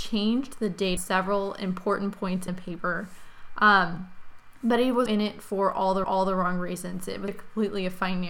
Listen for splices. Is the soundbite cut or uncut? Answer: cut